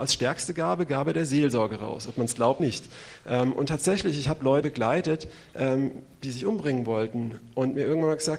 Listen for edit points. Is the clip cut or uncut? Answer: cut